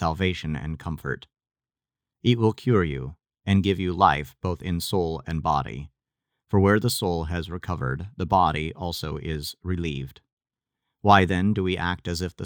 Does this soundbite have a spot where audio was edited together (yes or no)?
no